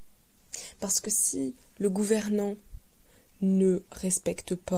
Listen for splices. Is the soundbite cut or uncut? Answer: uncut